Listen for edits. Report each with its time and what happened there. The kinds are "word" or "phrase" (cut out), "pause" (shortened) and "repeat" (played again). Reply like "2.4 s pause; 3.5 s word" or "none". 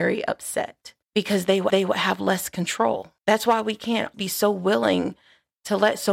1.0 s pause; 1.7 s repeat; 3.2 s pause; 4.1 s word

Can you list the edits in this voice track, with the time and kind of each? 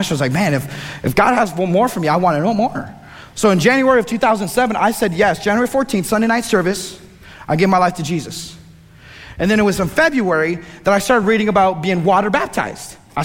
none

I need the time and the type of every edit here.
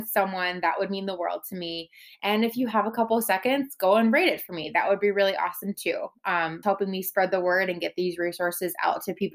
6.6 s word

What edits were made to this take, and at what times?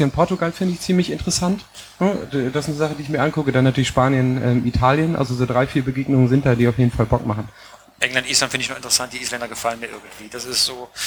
none

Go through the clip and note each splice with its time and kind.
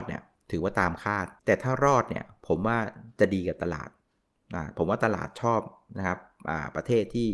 1.4 s pause

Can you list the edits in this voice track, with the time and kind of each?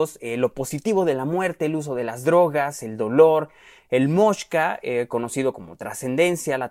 none

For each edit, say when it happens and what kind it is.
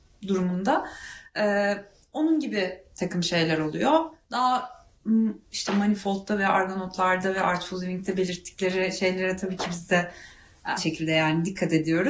10.8 s word

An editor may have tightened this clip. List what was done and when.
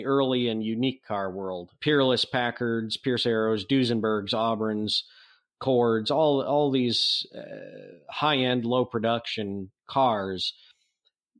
none

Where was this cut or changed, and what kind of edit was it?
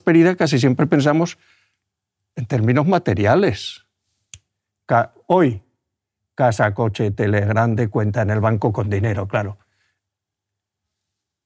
none

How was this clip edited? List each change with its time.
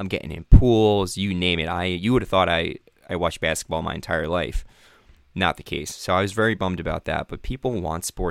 none

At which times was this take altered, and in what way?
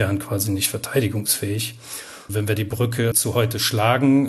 2.6 s word; 3.1 s word

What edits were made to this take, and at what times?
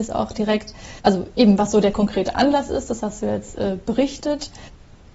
1.0 s pause

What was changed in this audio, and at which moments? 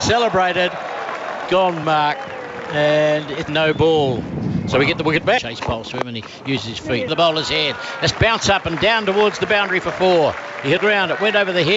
1.5 s word; 1.8 s phrase; 3.5 s word; 7.1 s phrase; 8.1 s word; 10.8 s phrase

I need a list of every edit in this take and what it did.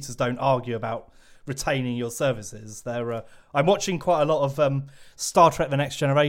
none

